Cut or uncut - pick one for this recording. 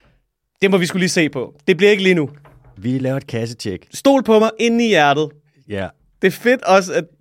uncut